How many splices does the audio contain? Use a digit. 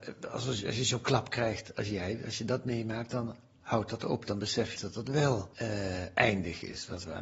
2